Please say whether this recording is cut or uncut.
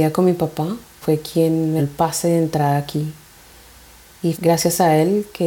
cut